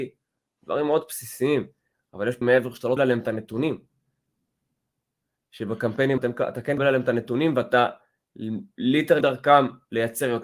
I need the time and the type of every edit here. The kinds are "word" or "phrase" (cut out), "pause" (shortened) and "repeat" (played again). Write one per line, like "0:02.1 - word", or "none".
0:02.4 - word
0:03.0 - word
0:06.2 - word
0:06.8 - word
0:09.2 - word